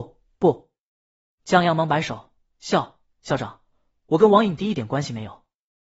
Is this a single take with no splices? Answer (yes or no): yes